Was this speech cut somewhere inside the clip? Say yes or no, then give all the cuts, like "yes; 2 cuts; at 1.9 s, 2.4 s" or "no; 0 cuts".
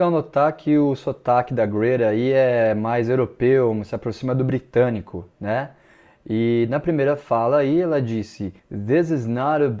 yes; 1 cut; at 8.6 s